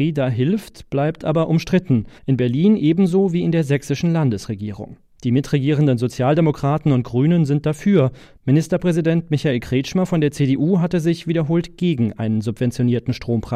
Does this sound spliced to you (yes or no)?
yes